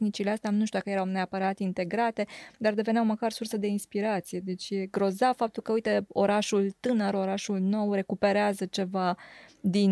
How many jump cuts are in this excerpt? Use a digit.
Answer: 0